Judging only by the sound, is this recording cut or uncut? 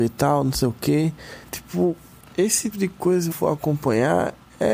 cut